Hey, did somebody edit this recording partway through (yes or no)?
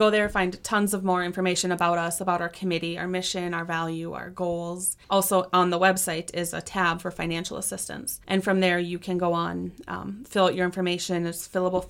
yes